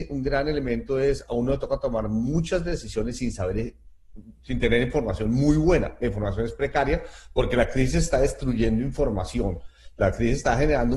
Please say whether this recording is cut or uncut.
uncut